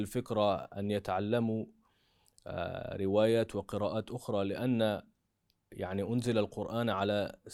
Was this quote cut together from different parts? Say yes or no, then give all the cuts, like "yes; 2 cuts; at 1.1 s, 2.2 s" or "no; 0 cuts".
no; 0 cuts